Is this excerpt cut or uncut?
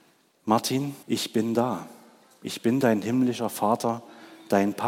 cut